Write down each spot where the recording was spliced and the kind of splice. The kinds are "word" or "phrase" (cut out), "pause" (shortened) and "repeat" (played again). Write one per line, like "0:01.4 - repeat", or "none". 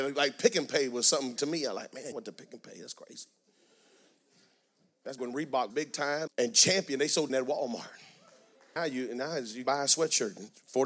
0:01.4 - word
0:02.1 - word
0:05.2 - word
0:05.7 - word
0:06.3 - word
0:07.3 - word
0:08.8 - word
0:09.6 - word